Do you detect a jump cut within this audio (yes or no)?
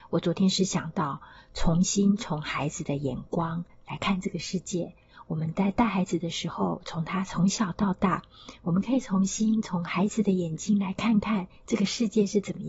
no